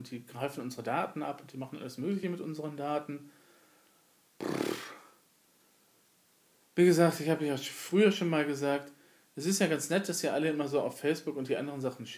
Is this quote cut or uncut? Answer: uncut